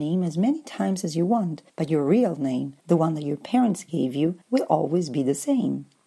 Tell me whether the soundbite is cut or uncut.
cut